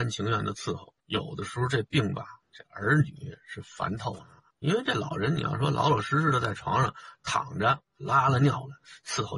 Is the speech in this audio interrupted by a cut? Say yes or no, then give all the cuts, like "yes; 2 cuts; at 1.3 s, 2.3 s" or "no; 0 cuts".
yes; 4 cuts; at 1.0 s, 2.4 s, 4.5 s, 7.9 s